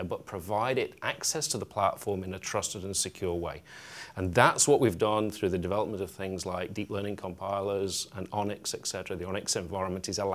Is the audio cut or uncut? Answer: uncut